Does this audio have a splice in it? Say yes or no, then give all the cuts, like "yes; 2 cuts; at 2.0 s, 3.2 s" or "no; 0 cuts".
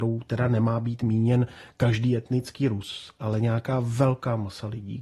no; 0 cuts